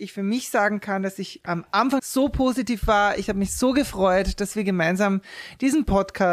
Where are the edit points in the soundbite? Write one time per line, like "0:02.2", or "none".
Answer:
0:02.0